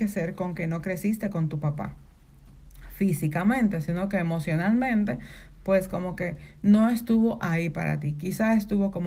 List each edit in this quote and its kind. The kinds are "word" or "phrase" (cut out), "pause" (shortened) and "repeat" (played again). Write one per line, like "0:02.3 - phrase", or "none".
none

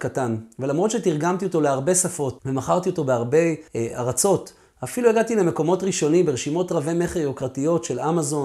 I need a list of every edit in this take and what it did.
0:03.7 - pause

